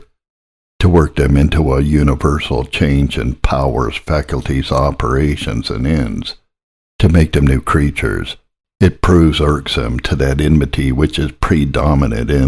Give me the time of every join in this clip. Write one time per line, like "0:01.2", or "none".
none